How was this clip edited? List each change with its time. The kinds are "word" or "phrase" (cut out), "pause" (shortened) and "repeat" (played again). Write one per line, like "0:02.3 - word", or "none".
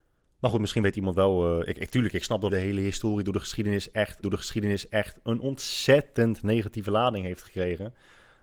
0:02.5 - phrase
0:04.2 - repeat